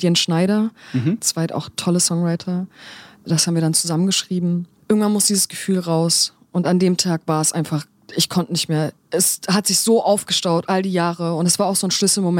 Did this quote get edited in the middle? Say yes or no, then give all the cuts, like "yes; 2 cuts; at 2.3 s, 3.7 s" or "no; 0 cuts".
no; 0 cuts